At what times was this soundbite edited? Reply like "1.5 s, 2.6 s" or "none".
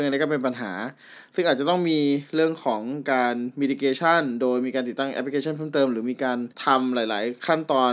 6.5 s